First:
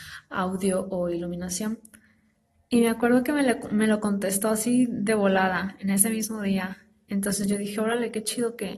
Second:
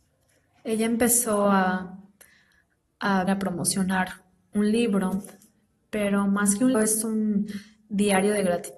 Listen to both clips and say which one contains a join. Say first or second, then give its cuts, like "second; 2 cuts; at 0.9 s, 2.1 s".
second; 2 cuts; at 3.3 s, 6.7 s